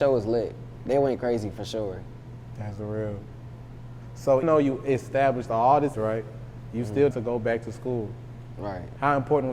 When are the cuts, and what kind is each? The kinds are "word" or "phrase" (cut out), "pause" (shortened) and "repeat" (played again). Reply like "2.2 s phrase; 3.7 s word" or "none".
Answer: 4.4 s word; 5.9 s word; 7.1 s word